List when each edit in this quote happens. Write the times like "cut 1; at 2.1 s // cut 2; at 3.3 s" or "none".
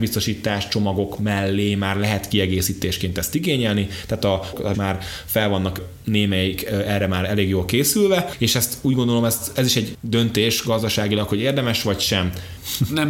cut 1; at 4.7 s